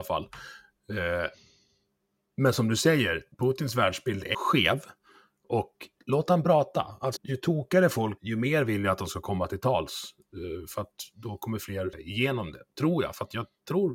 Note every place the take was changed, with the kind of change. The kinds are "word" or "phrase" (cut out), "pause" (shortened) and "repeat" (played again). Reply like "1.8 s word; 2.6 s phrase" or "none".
3.3 s pause; 4.3 s word; 6.0 s word; 7.2 s word; 8.2 s word; 11.9 s word